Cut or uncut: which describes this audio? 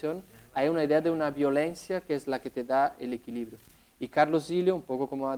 uncut